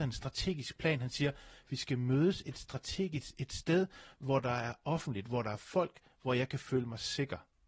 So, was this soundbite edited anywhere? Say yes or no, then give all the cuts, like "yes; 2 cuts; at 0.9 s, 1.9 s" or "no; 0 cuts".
no; 0 cuts